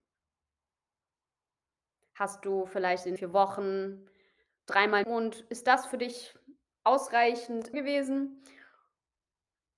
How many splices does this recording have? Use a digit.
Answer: 3